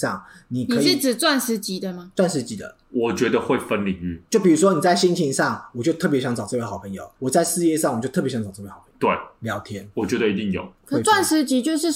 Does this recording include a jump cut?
yes; 2 cuts; at 2.8 s, 7.1 s

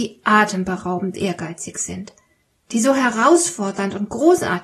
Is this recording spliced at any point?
no; 0 cuts

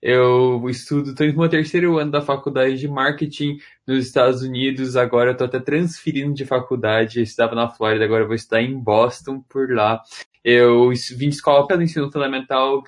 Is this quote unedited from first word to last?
no; 1 cut; at 11.7 s

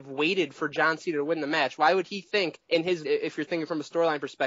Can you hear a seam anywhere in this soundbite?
yes; 2 cuts; at 2.6 s, 3.0 s

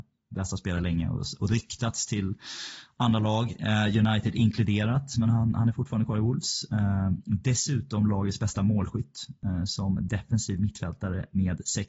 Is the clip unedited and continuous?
yes; 0 cuts

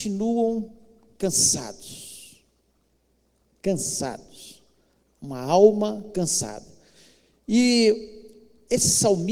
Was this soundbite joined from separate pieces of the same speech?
no; 0 cuts

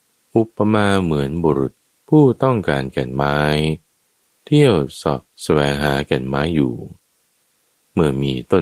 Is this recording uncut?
no; 1 cut; at 1.8 s

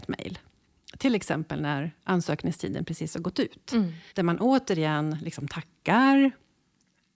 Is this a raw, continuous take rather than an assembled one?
no; 1 cut; at 4.1 s

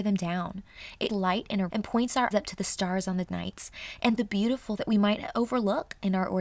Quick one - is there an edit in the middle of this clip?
yes; 6 cuts; at 1.1 s, 1.7 s, 2.3 s, 3.2 s, 4.2 s, 4.8 s

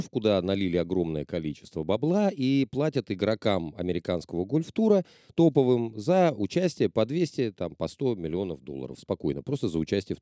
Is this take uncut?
yes; 0 cuts

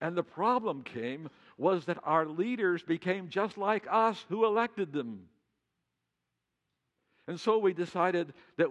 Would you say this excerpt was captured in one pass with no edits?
yes; 0 cuts

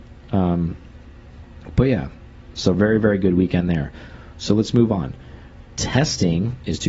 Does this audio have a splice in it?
no; 0 cuts

